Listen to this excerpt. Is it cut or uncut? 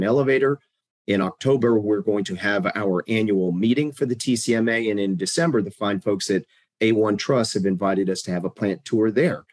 uncut